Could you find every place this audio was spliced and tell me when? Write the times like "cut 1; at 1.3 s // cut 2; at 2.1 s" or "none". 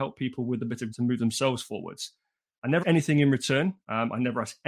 cut 1; at 0.9 s // cut 2; at 2.8 s